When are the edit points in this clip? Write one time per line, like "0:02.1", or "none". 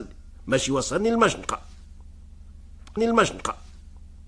0:03.0